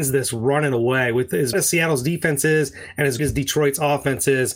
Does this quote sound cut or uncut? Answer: cut